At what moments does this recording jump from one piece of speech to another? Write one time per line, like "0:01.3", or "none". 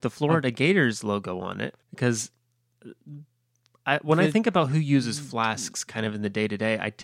0:01.8